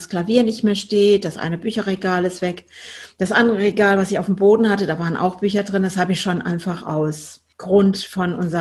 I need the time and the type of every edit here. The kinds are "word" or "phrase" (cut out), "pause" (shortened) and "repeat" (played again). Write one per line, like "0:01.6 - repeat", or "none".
0:07.5 - pause